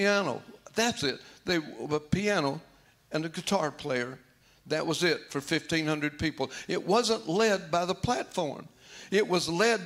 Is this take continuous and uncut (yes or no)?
yes